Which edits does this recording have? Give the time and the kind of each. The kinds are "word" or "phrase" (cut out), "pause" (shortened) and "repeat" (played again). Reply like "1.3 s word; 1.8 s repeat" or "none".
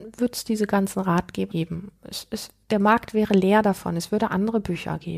1.5 s word